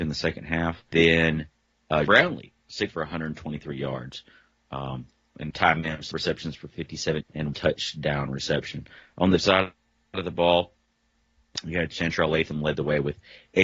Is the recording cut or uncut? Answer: cut